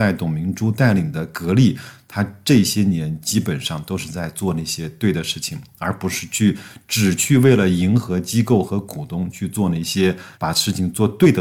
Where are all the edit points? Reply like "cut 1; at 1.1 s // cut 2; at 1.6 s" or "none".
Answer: cut 1; at 10.3 s

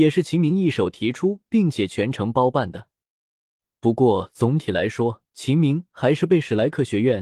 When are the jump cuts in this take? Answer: cut 1; at 5.2 s

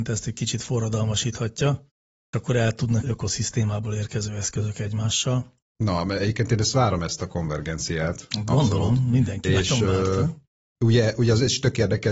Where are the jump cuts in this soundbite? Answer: cut 1; at 2.3 s // cut 2; at 3.0 s

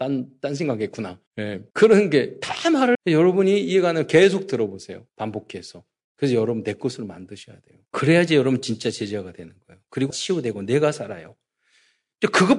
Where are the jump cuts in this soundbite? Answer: cut 1; at 1.3 s // cut 2; at 1.7 s // cut 3; at 2.9 s // cut 4; at 5.1 s // cut 5; at 7.9 s // cut 6; at 10.1 s

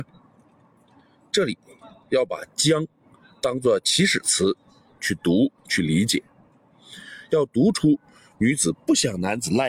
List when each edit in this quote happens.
none

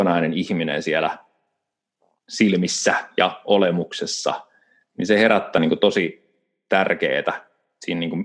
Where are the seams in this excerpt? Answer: cut 1; at 5.6 s

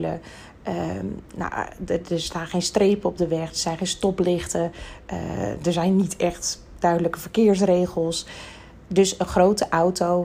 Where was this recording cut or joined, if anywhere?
none

